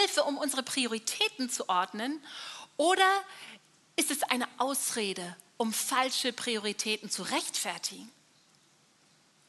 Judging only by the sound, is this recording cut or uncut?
uncut